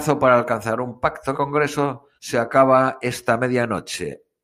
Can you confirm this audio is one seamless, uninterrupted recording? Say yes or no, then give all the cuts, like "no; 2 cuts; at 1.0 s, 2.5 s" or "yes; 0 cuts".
no; 2 cuts; at 1.3 s, 2.2 s